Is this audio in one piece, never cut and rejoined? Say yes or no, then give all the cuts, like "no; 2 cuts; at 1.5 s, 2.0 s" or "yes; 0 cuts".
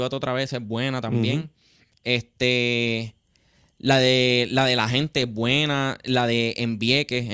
yes; 0 cuts